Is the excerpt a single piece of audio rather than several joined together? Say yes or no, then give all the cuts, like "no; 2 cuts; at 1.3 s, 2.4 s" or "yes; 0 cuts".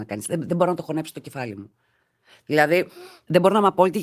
yes; 0 cuts